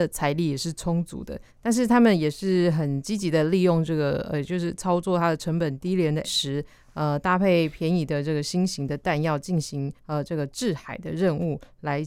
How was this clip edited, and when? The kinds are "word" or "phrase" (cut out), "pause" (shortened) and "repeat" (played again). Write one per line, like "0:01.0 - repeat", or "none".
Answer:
0:01.5 - pause
0:06.2 - word
0:10.0 - pause